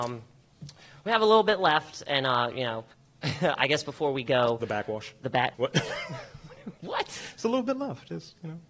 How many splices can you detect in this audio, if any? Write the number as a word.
two